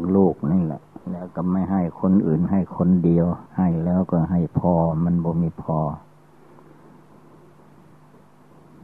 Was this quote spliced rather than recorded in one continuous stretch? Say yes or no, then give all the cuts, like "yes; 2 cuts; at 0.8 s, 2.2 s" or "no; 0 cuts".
yes; 2 cuts; at 1.0 s, 3.5 s